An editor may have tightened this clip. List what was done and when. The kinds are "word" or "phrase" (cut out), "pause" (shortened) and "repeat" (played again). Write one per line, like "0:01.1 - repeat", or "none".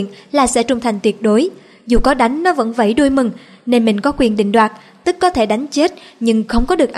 none